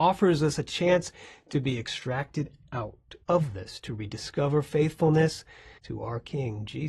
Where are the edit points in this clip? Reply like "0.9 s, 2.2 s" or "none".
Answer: 3.2 s, 5.8 s